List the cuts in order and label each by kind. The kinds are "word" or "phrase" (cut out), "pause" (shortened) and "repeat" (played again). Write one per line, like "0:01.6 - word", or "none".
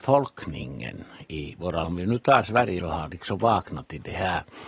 0:01.8 - word
0:02.8 - phrase